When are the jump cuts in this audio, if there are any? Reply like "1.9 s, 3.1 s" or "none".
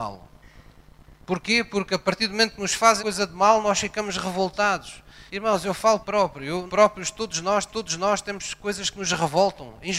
3.0 s, 5.3 s, 6.0 s, 6.7 s, 7.7 s